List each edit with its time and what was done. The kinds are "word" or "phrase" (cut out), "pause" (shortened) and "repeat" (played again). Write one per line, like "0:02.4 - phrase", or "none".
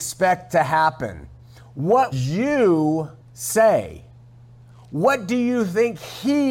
0:02.1 - word
0:03.2 - pause